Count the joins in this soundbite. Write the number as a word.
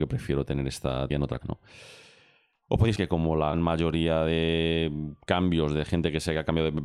four